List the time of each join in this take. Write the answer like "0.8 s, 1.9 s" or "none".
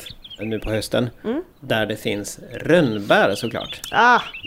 1.5 s